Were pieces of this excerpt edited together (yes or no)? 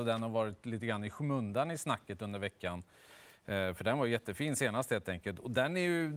no